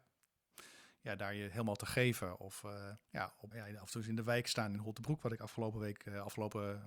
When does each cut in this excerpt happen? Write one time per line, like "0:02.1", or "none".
0:03.0
0:03.5